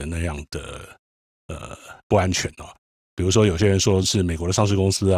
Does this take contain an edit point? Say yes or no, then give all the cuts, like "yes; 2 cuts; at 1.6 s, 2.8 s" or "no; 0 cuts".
yes; 1 cut; at 4.0 s